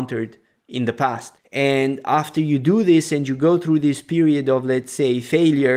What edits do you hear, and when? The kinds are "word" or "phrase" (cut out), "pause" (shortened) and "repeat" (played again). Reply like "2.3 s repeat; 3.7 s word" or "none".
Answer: none